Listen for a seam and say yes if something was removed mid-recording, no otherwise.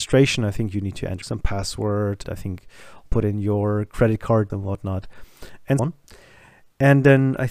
yes